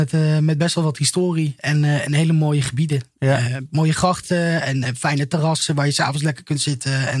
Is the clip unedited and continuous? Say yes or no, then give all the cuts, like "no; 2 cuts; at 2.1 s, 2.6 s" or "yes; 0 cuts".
no; 1 cut; at 4.8 s